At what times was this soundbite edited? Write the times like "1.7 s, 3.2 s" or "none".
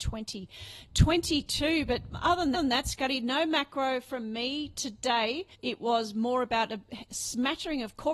2.5 s, 5.5 s